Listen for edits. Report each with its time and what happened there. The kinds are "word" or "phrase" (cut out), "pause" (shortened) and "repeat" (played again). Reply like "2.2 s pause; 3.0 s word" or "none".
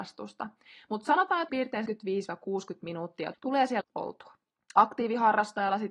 1.5 s word; 1.9 s word; 3.3 s word; 3.8 s word